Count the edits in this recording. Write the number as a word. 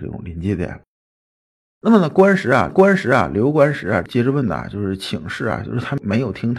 one